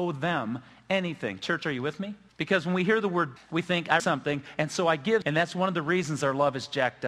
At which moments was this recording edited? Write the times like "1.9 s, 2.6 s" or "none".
2.3 s, 3.4 s, 4.0 s, 5.2 s